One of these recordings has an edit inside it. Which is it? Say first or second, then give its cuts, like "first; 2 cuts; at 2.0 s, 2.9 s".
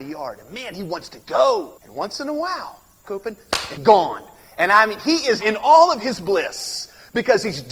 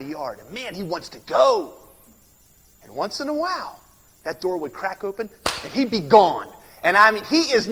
first; 4 cuts; at 1.8 s, 3.0 s, 3.8 s, 5.4 s